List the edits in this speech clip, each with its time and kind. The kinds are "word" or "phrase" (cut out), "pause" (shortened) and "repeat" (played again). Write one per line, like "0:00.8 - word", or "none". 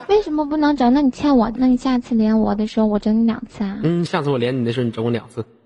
0:01.5 - word
0:04.1 - phrase